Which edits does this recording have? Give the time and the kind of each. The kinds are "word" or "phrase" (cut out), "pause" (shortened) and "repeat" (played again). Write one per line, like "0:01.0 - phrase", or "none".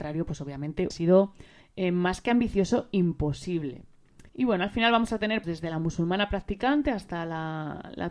0:00.9 - word
0:01.6 - pause
0:04.3 - pause
0:05.4 - word